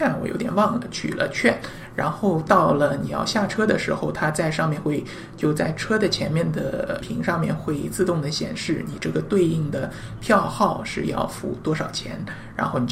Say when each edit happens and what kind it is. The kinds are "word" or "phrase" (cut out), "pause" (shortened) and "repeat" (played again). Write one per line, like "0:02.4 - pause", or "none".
0:07.0 - word